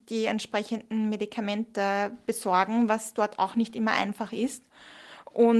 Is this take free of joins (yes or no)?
yes